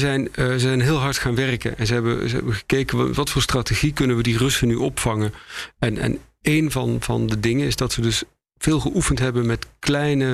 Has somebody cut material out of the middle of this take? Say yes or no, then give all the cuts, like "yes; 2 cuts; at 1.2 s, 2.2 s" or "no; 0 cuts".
no; 0 cuts